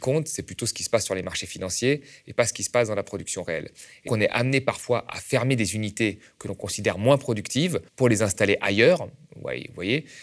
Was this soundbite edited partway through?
yes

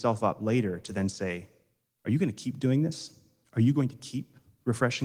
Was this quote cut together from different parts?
no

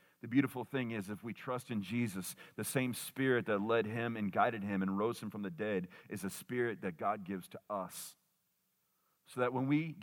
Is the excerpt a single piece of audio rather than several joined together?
yes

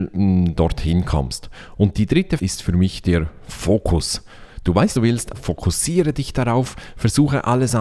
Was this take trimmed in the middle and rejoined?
yes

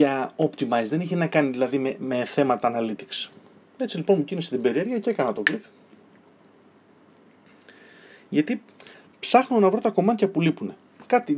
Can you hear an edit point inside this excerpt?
no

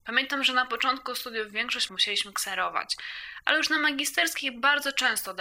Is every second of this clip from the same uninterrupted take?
no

